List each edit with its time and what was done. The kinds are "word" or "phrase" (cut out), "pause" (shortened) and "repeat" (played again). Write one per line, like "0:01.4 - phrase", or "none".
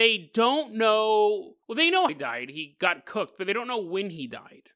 0:01.6 - pause
0:02.1 - word